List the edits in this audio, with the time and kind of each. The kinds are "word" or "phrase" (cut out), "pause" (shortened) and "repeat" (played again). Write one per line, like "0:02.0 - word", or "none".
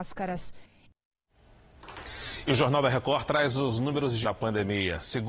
0:04.2 - word